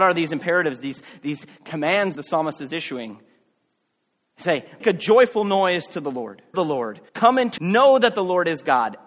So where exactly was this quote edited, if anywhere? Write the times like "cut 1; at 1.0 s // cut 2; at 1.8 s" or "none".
cut 1; at 2.1 s // cut 2; at 4.8 s // cut 3; at 6.5 s // cut 4; at 7.1 s // cut 5; at 7.6 s